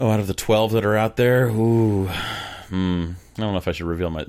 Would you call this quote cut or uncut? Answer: uncut